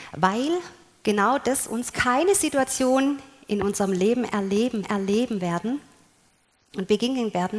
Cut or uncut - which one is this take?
cut